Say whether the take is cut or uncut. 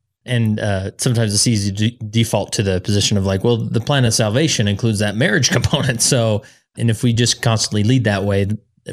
uncut